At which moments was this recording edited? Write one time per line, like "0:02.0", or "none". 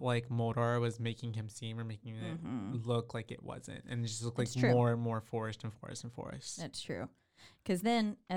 none

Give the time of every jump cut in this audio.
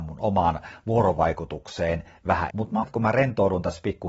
0:02.2
0:02.5
0:02.8

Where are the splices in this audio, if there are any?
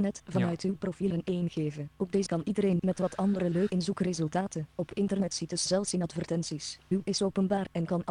0:01.1
0:02.3
0:02.8
0:03.7
0:05.7
0:07.0

